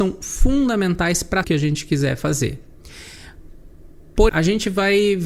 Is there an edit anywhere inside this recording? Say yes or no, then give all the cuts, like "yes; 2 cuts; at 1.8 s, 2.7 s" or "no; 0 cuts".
yes; 2 cuts; at 1.4 s, 4.3 s